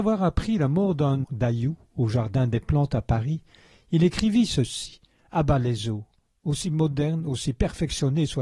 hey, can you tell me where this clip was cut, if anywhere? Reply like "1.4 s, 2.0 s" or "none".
1.2 s